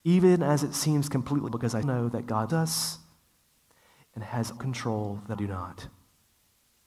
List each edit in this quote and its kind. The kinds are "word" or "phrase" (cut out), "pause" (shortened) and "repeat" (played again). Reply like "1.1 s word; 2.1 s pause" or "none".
1.5 s word; 1.8 s word; 2.5 s word; 4.6 s word; 5.3 s word